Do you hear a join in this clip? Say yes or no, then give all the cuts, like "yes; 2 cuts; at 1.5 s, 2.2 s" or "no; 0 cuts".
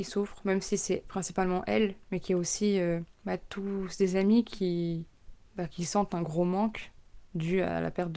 no; 0 cuts